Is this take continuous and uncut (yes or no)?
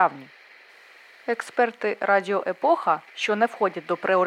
no